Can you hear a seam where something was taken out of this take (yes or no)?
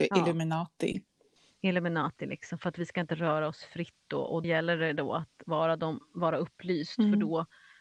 yes